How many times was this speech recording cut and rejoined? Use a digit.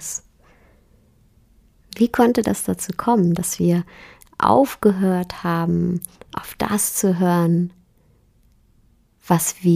0